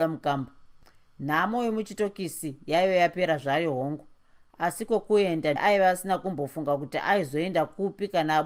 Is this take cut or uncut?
cut